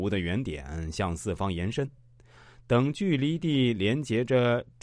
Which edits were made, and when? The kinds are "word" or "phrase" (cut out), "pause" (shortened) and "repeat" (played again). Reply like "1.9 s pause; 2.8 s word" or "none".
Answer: none